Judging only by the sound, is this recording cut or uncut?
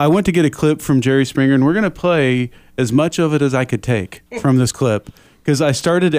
uncut